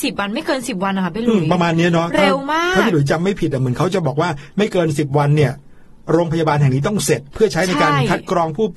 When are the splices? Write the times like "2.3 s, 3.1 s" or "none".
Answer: none